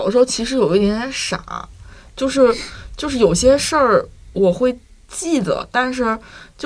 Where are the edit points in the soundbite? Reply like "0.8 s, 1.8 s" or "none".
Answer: none